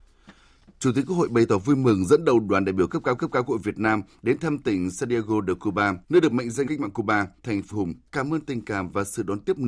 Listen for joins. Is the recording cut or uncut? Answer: cut